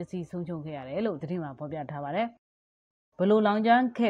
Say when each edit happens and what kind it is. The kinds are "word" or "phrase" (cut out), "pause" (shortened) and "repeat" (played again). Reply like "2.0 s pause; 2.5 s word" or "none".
1.2 s word